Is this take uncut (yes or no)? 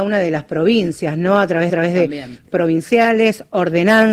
no